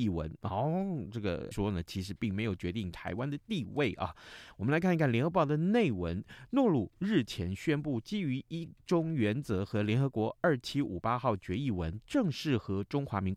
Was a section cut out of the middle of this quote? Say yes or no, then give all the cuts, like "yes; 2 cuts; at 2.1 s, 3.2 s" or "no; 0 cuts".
yes; 1 cut; at 1.5 s